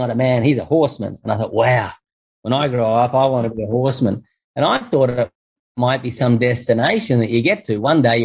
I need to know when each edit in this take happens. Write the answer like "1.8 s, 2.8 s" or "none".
none